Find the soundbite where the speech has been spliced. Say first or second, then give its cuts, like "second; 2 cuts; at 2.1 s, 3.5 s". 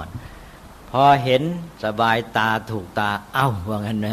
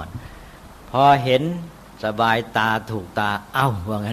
first; 1 cut; at 1.8 s